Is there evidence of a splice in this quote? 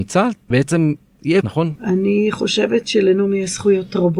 yes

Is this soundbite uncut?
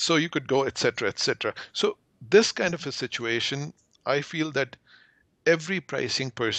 yes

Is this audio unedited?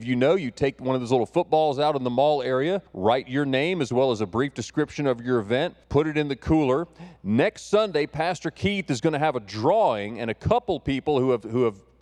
no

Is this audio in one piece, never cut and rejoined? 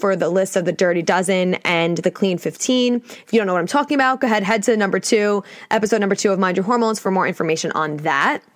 yes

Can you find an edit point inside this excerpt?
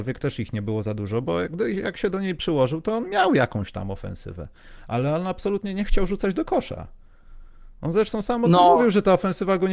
no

